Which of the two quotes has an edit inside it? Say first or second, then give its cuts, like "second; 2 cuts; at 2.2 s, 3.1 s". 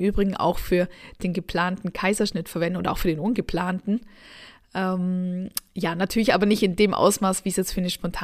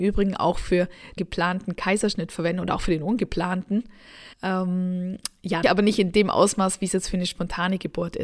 second; 3 cuts; at 1.2 s, 4.3 s, 5.6 s